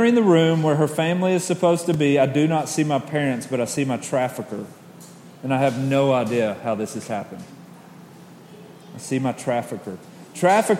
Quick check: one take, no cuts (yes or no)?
yes